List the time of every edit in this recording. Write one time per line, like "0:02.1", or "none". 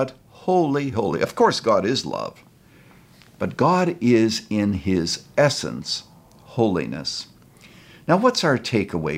0:00.9